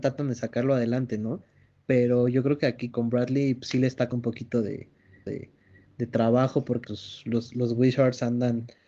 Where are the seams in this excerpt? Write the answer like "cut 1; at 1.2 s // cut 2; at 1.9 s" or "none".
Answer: cut 1; at 2.9 s // cut 2; at 4.1 s // cut 3; at 5.3 s // cut 4; at 6.8 s

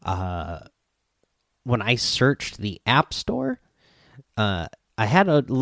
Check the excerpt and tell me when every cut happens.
none

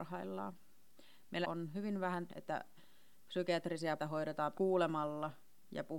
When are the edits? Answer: cut 1; at 1.4 s // cut 2; at 2.3 s // cut 3; at 4.0 s // cut 4; at 4.5 s

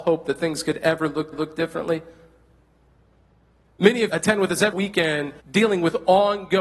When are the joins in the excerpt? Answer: cut 1; at 1.3 s // cut 2; at 4.1 s // cut 3; at 4.7 s // cut 4; at 5.4 s

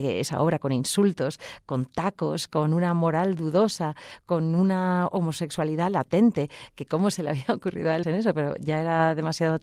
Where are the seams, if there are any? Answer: cut 1; at 8.0 s

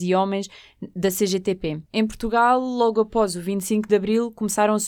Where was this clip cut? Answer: none

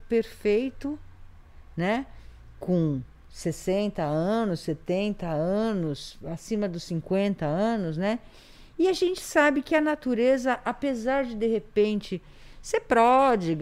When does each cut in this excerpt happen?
none

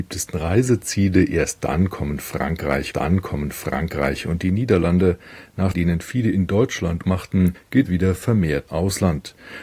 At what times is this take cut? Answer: cut 1; at 2.9 s // cut 2; at 5.7 s // cut 3; at 7.0 s // cut 4; at 7.9 s // cut 5; at 8.7 s

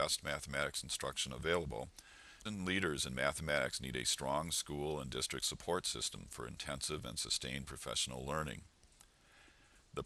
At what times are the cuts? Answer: cut 1; at 2.5 s

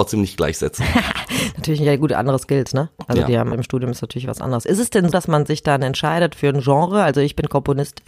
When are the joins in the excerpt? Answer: cut 1; at 3.5 s // cut 2; at 5.1 s

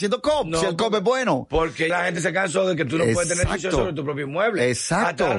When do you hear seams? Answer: cut 1; at 1.9 s

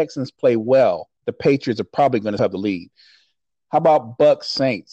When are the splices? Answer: cut 1; at 1.2 s // cut 2; at 2.4 s

